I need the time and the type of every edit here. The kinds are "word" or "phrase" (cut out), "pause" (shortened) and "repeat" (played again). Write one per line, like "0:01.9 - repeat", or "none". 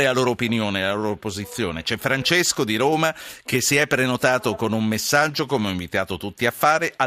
none